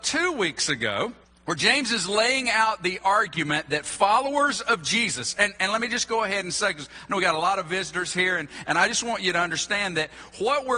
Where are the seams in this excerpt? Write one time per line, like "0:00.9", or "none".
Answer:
0:01.2